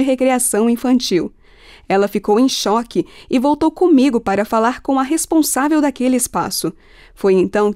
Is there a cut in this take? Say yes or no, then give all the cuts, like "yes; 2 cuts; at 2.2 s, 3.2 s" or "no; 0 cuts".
no; 0 cuts